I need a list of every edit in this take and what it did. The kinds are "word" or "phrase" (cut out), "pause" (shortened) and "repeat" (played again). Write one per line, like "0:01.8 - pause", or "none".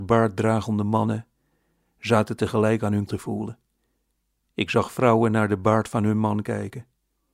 0:03.1 - word